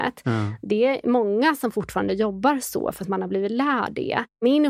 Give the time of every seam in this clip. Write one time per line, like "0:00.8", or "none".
none